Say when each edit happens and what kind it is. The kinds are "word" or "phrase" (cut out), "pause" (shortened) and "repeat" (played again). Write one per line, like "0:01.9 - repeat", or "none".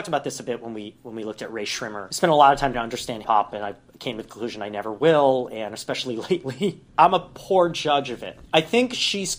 0:02.7 - word
0:03.2 - word